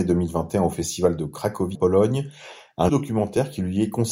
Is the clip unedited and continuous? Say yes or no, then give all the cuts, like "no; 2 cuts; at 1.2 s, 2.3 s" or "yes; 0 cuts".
no; 2 cuts; at 1.7 s, 2.9 s